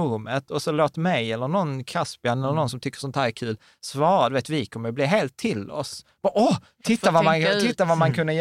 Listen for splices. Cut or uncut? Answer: uncut